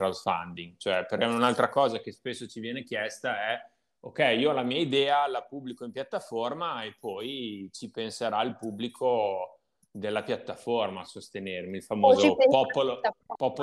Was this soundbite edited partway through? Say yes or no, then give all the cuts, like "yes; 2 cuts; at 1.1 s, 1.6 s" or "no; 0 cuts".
no; 0 cuts